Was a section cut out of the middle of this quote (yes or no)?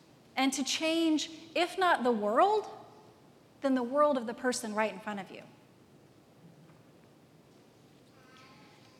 no